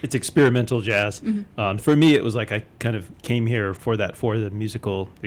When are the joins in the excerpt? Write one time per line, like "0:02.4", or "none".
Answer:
0:01.8
0:03.8